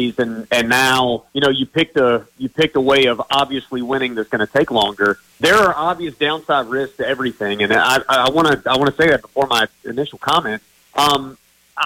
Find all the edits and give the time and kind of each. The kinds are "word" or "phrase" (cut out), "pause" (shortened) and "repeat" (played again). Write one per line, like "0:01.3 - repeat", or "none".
0:01.3 - pause
0:05.3 - pause
0:10.7 - pause